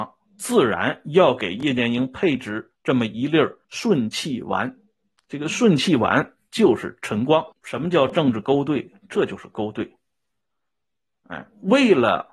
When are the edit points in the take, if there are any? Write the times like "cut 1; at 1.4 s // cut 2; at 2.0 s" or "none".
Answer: cut 1; at 3.6 s // cut 2; at 7.5 s